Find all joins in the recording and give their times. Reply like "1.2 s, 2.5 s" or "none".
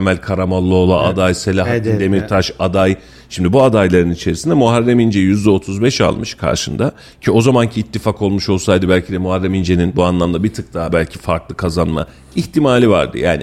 none

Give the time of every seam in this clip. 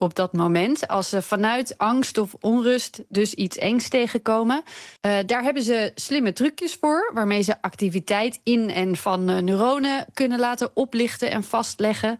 5.0 s

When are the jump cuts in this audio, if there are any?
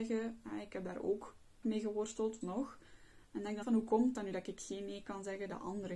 1.6 s, 2.4 s, 3.6 s

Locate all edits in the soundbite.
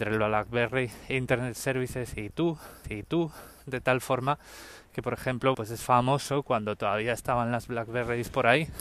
2.8 s, 5.5 s

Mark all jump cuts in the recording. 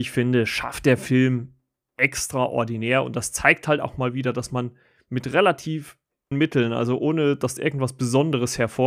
6.3 s, 7.6 s

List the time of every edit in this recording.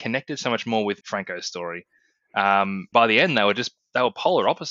1.0 s, 2.9 s

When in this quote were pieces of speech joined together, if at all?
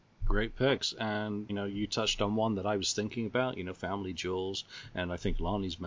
1.5 s

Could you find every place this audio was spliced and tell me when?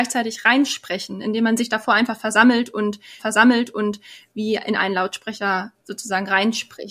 3.2 s, 5.8 s

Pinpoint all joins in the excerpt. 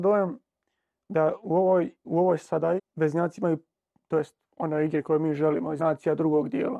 2.0 s, 2.8 s, 5.8 s

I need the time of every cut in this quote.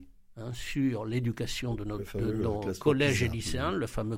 none

